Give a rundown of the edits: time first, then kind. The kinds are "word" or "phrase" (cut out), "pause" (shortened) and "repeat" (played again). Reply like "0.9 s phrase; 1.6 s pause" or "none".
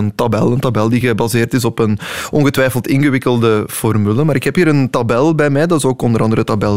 none